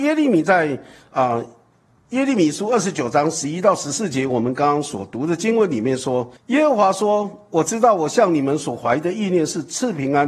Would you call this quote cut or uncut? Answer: cut